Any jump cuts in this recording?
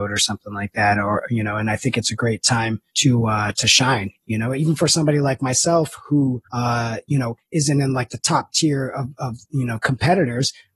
yes; 4 cuts; at 2.9 s, 6.4 s, 7.4 s, 9.4 s

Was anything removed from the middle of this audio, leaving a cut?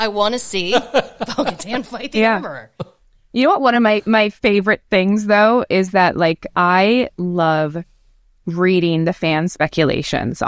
no; 0 cuts

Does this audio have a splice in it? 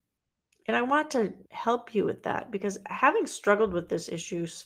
yes; 1 cut; at 1.5 s

